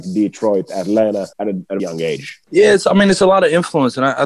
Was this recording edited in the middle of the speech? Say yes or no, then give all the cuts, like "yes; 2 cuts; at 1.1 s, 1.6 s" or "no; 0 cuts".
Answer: yes; 3 cuts; at 1.3 s, 1.8 s, 2.4 s